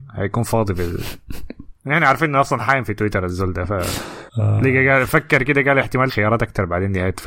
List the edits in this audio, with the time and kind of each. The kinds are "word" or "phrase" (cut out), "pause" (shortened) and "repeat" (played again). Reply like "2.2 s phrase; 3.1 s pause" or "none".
1.8 s pause; 4.3 s pause; 6.1 s word